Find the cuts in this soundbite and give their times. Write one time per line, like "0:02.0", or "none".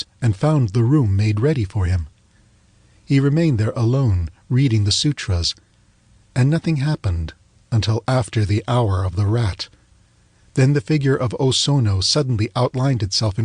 none